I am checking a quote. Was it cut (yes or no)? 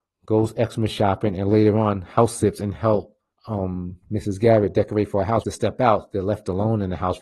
yes